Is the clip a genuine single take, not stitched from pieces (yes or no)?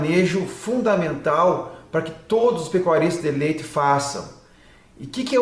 yes